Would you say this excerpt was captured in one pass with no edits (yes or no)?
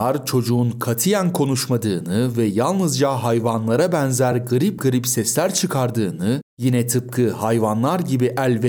yes